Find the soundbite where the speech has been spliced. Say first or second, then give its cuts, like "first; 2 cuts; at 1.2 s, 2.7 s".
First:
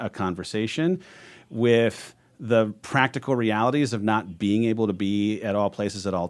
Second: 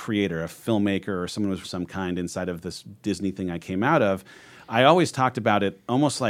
second; 1 cut; at 1.6 s